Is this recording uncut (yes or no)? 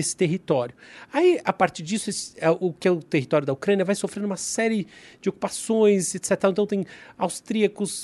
yes